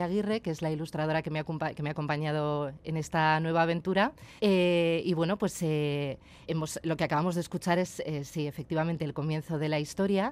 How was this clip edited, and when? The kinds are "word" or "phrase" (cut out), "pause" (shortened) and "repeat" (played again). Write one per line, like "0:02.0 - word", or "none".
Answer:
0:04.4 - pause
0:06.5 - word